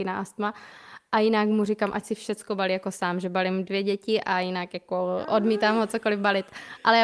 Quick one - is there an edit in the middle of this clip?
no; 0 cuts

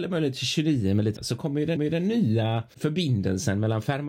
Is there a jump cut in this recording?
yes; 2 cuts; at 1.2 s, 1.8 s

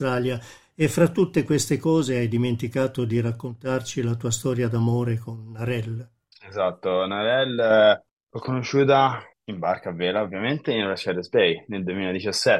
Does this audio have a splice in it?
yes; 3 cuts; at 6.2 s, 8.1 s, 9.3 s

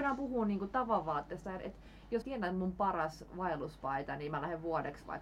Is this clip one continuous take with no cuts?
no; 1 cut; at 2.2 s

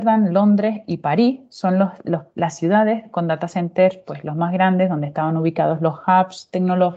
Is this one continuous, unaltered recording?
yes; 0 cuts

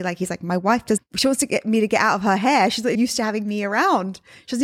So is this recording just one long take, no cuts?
no; 2 cuts; at 1.0 s, 2.9 s

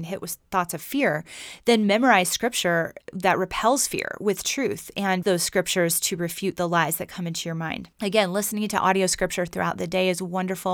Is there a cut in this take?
yes; 2 cuts; at 5.2 s, 7.9 s

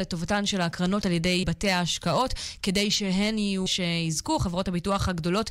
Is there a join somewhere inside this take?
yes; 3 cuts; at 1.0 s, 1.4 s, 3.7 s

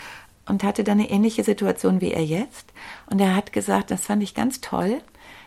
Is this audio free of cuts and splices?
yes; 0 cuts

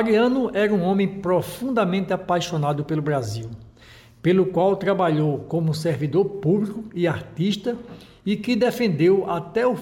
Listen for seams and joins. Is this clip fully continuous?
yes; 0 cuts

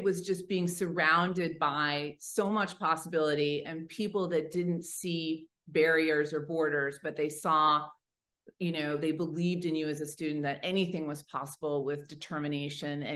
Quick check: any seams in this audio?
no; 0 cuts

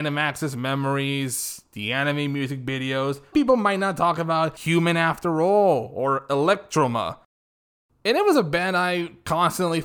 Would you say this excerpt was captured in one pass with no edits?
no; 1 cut; at 3.3 s

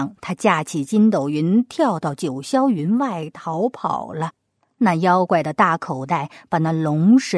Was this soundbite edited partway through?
no; 0 cuts

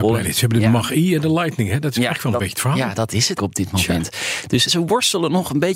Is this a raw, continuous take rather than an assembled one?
no; 2 cuts; at 3.4 s, 4.7 s

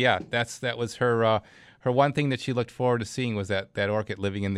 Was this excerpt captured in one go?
yes; 0 cuts

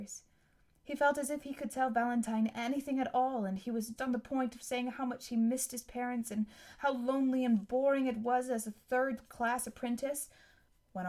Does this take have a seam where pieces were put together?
yes; 2 cuts; at 2.5 s, 4.0 s

